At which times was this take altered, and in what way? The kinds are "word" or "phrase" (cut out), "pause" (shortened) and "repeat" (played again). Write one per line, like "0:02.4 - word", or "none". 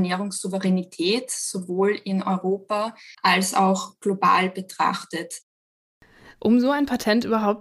0:03.1 - pause